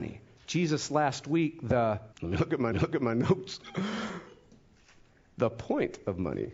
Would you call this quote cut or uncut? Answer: cut